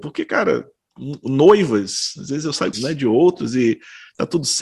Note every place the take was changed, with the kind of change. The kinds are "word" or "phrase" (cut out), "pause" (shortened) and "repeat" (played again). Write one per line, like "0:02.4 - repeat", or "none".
0:02.7 - phrase